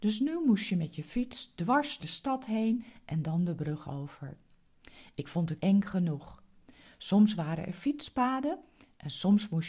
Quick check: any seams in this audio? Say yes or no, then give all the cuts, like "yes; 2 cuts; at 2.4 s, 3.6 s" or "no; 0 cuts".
yes; 2 cuts; at 2.0 s, 5.6 s